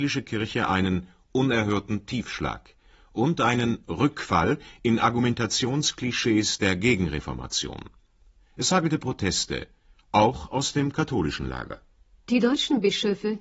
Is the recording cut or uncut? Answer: uncut